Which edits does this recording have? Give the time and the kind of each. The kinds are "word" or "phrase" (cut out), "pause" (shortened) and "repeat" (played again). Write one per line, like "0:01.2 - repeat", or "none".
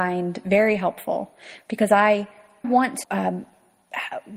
0:02.6 - word
0:03.0 - word